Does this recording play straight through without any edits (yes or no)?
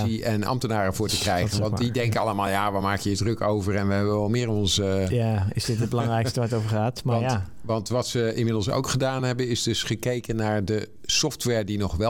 yes